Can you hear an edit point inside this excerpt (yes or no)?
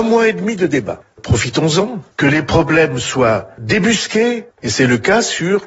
no